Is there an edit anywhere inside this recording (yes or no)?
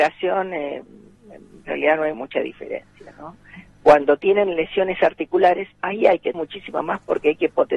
yes